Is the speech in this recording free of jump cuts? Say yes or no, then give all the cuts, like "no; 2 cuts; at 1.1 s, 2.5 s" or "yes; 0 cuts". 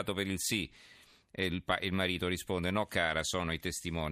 yes; 0 cuts